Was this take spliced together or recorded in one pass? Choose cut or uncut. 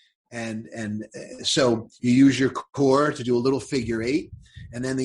uncut